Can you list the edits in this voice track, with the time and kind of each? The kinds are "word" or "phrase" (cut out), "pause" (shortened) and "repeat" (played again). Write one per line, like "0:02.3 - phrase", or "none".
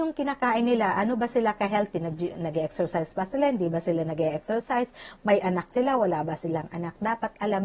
0:05.7 - word